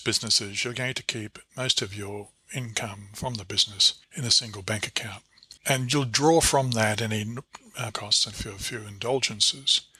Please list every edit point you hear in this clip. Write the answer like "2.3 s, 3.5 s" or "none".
4.0 s, 5.6 s, 7.9 s, 8.3 s

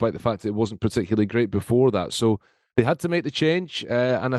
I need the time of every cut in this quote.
none

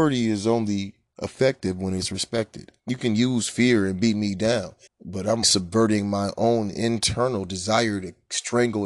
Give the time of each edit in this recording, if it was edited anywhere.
2.8 s, 4.9 s, 5.4 s

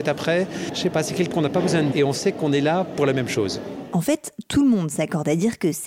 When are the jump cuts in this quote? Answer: 1.3 s, 1.9 s

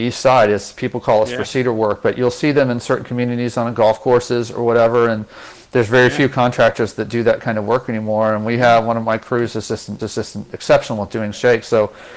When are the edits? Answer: 10.0 s

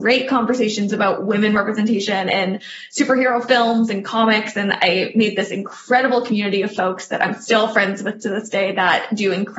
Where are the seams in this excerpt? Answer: none

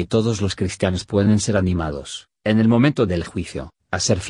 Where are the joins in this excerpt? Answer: none

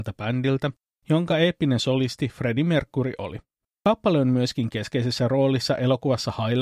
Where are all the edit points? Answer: none

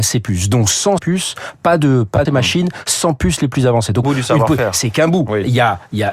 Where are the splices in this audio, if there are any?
1.0 s, 2.3 s, 4.0 s

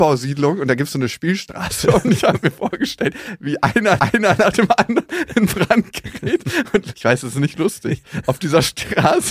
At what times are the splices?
4.0 s, 6.9 s

